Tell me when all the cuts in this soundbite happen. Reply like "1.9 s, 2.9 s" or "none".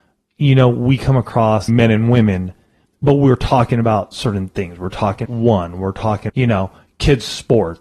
1.7 s, 2.8 s, 5.2 s, 6.3 s